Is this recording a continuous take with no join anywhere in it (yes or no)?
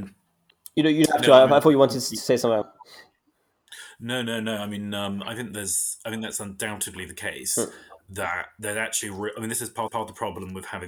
no